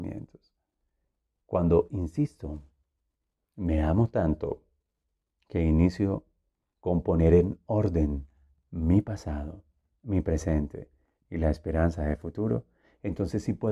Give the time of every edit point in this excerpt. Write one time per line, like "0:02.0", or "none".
none

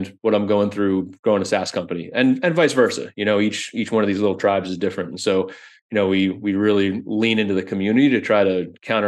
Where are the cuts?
none

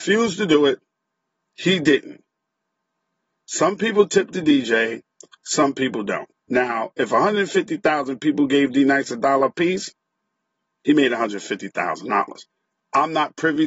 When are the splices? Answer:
0:06.4

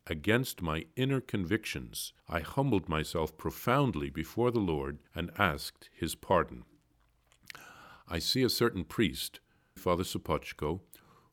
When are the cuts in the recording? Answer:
0:02.2
0:05.1
0:09.8

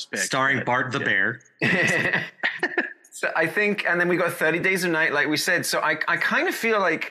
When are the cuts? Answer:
none

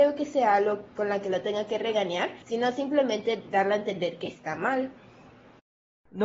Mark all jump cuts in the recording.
0:02.4

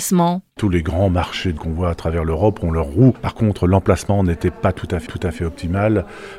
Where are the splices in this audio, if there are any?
0:01.6
0:05.1

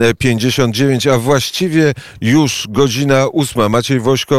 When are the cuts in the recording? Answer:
none

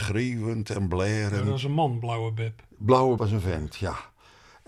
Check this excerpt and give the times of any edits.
0:03.2

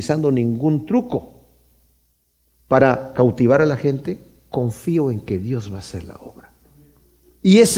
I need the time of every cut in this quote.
none

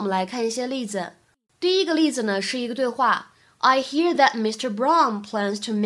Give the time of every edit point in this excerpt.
none

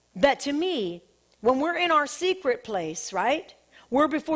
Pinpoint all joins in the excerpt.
none

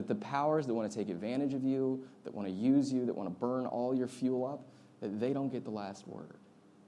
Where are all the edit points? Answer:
none

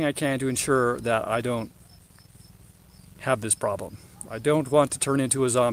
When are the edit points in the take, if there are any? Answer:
none

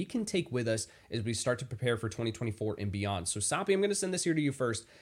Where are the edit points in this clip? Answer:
none

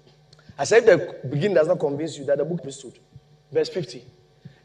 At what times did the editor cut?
0:02.6

